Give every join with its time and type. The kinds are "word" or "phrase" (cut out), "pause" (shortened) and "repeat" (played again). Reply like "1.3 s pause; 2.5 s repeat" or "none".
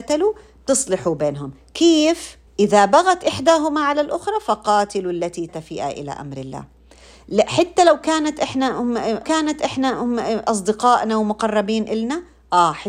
2.5 s pause; 5.5 s phrase; 9.2 s repeat